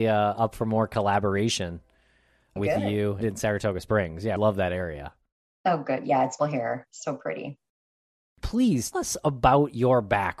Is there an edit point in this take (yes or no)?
yes